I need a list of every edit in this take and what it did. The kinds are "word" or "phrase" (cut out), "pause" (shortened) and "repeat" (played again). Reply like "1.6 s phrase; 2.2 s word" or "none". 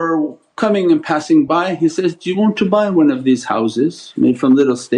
none